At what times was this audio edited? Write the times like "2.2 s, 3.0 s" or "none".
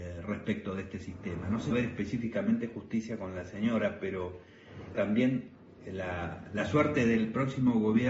1.7 s, 4.9 s